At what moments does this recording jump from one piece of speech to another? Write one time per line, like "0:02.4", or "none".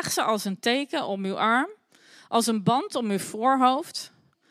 none